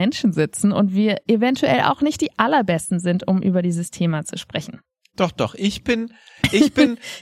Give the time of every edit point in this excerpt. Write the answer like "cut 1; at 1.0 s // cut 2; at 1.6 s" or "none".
none